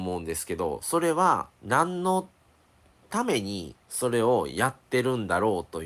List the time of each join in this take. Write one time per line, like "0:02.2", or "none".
0:01.5
0:03.8